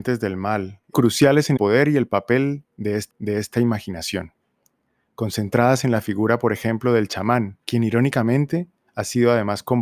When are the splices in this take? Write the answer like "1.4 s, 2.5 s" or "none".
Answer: 0.9 s, 1.6 s, 3.1 s, 7.6 s